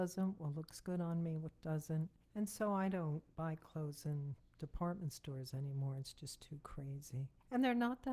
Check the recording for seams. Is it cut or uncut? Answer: uncut